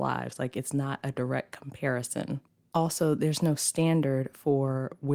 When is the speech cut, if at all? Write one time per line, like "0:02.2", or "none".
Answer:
0:02.5